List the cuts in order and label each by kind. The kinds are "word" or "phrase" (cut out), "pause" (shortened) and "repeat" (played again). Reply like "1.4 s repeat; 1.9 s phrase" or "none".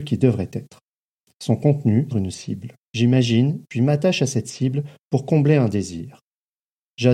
2.1 s phrase; 2.8 s pause